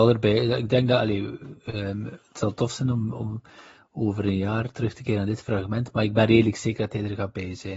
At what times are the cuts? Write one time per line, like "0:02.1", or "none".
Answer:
none